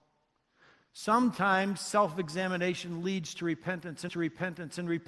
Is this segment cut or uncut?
cut